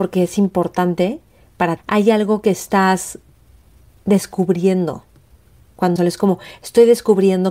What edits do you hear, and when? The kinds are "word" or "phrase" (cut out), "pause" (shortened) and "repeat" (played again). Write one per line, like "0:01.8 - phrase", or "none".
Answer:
0:01.8 - word
0:06.0 - word